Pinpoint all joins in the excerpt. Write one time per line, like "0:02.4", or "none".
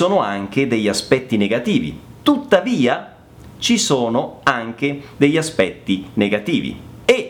0:02.2